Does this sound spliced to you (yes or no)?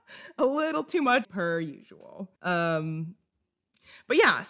yes